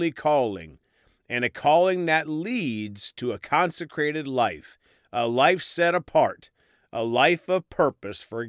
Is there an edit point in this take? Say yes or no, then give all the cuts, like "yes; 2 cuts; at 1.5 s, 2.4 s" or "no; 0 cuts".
no; 0 cuts